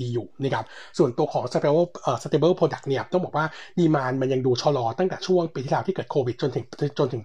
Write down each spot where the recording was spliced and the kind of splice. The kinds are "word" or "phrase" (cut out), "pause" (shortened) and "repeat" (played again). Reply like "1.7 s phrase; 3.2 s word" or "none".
none